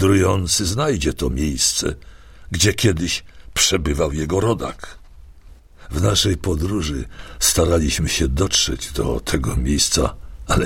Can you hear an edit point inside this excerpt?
no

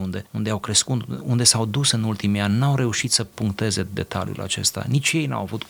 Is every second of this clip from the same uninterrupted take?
yes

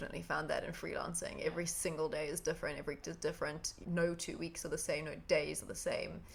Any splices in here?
yes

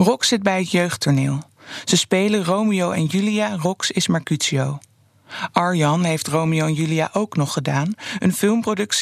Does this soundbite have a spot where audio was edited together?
no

